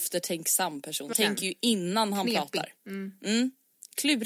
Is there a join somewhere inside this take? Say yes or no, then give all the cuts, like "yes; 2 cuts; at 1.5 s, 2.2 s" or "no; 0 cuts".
yes; 2 cuts; at 1.1 s, 2.8 s